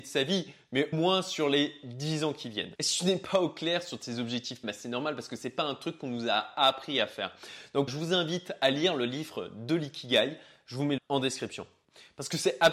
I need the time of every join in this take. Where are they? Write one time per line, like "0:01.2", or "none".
0:00.9
0:04.6
0:07.9
0:11.0

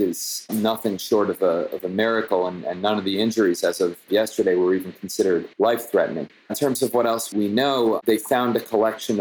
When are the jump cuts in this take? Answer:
0:05.5

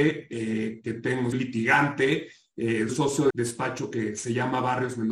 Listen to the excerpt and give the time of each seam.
0:01.3
0:02.9
0:03.3

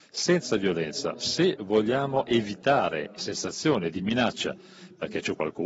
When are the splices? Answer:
0:03.2

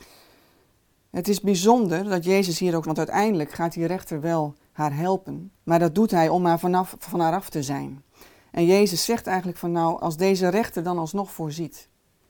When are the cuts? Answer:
0:02.8
0:05.6
0:10.0

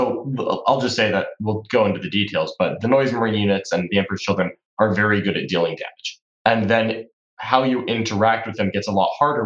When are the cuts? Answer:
none

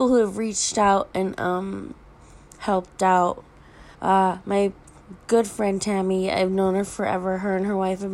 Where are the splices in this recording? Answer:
0:03.9

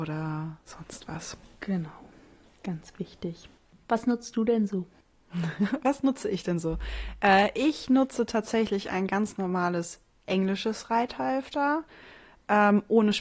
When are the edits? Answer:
none

